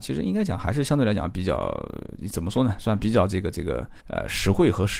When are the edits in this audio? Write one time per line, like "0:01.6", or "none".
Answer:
0:04.0

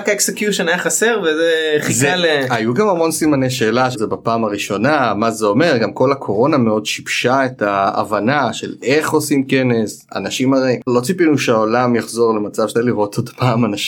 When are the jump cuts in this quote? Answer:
0:03.9
0:10.9
0:12.7

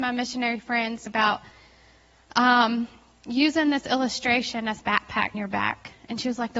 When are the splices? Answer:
0:01.1
0:04.8
0:05.3

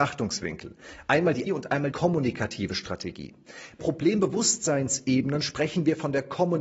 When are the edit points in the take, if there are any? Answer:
0:01.5
0:01.9
0:03.8

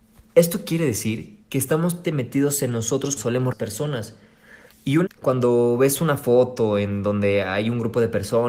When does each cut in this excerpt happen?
0:01.4
0:02.0
0:03.2
0:03.5
0:04.7
0:05.1

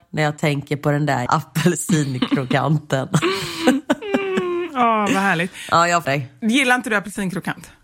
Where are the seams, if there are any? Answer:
0:01.3
0:06.0

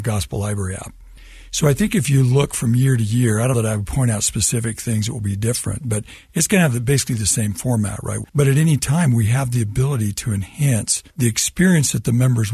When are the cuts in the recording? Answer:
0:03.5
0:08.3
0:11.1

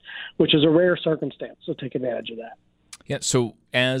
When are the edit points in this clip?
0:03.0

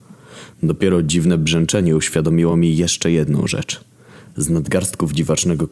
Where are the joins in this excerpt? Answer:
none

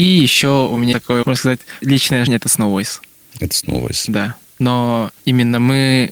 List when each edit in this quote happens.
0:00.9
0:01.2
0:01.8
0:02.3

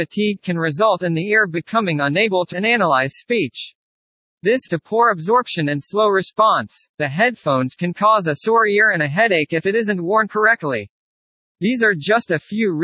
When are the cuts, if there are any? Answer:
0:02.5
0:04.7
0:06.9

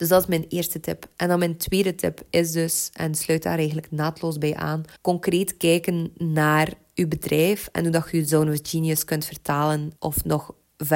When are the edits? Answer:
0:05.0
0:10.0

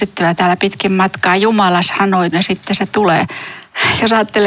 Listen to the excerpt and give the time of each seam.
0:02.3

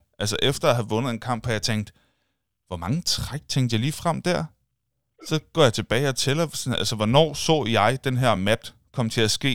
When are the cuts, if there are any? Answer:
none

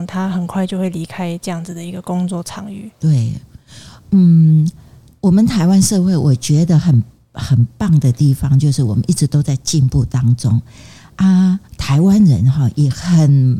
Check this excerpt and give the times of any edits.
0:11.7

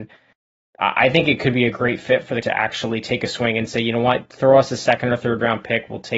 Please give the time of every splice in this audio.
0:02.4

